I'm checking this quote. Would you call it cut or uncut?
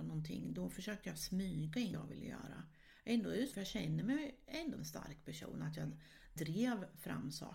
cut